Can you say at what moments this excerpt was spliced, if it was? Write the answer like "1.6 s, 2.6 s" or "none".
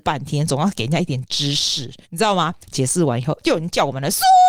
2.0 s, 2.6 s